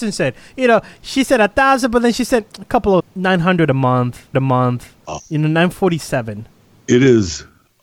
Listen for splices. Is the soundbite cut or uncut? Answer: cut